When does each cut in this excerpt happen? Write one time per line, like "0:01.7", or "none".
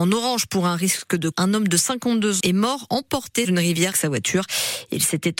0:01.3
0:02.4
0:03.4
0:03.9